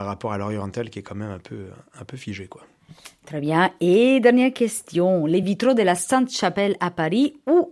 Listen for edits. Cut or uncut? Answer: uncut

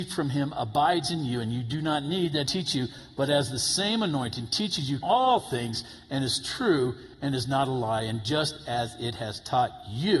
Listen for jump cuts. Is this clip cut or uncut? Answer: cut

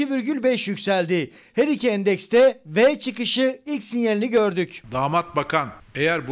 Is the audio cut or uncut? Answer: uncut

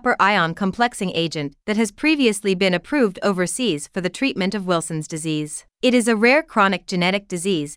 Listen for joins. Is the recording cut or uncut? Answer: cut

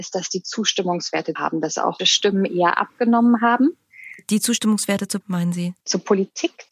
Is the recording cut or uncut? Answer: cut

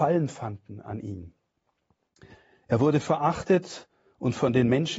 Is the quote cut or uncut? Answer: uncut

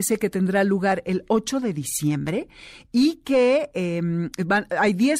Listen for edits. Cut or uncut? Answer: uncut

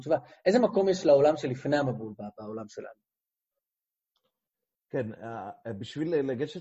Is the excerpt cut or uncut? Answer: uncut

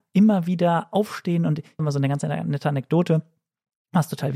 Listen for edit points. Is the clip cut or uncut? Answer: cut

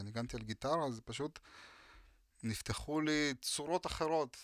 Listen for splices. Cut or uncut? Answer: uncut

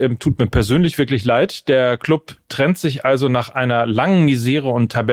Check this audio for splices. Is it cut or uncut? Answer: uncut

